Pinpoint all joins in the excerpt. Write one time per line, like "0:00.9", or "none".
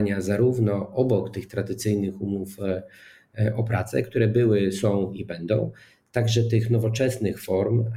none